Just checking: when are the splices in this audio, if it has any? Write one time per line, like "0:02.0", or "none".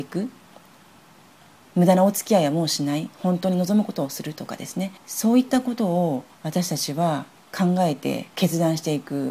0:05.0
0:06.3
0:07.4
0:08.3